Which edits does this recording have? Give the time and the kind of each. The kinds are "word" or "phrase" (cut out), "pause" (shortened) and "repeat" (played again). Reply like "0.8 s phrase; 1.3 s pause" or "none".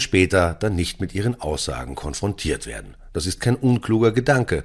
none